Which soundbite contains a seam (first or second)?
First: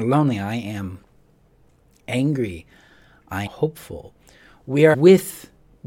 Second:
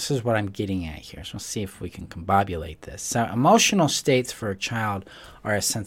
first